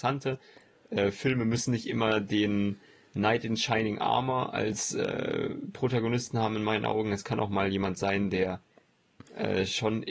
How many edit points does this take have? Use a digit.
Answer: 0